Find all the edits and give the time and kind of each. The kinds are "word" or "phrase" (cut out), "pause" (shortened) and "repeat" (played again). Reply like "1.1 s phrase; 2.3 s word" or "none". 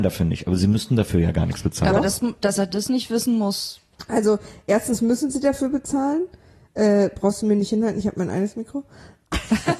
none

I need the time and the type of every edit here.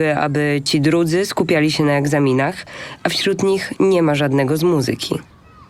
none

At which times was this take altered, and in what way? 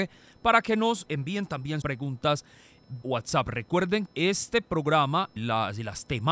1.1 s word; 1.8 s word; 3.0 s word; 4.1 s word; 5.4 s word

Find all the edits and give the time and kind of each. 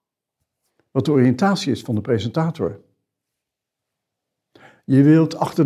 none

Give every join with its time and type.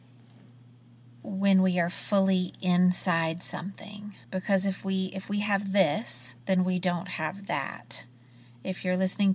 4.2 s pause; 6.4 s pause

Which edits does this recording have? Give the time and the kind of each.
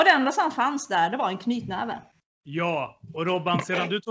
2.1 s pause

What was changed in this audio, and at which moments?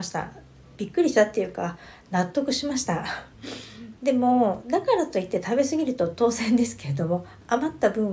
3.3 s pause

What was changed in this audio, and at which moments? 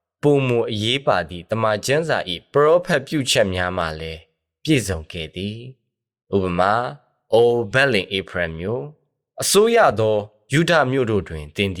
none

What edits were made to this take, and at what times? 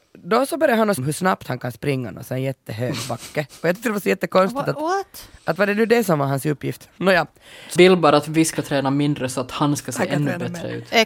1.0 s word; 7.8 s word

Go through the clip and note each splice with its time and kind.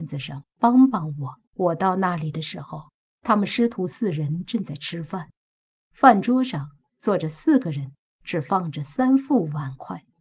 1.4 s pause

